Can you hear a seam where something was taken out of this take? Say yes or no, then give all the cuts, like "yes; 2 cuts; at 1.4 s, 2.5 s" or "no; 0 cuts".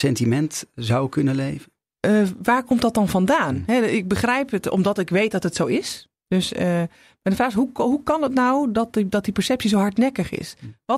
no; 0 cuts